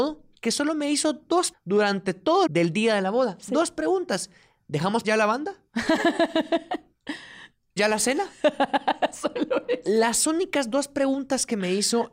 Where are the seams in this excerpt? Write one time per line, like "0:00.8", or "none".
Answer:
0:01.5
0:02.5
0:05.0
0:07.8